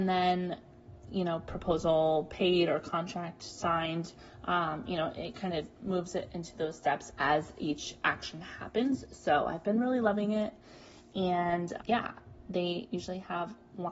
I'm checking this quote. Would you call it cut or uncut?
cut